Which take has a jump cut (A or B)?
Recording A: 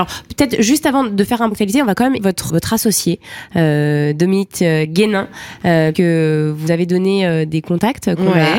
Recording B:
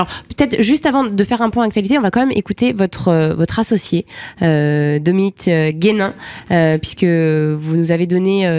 A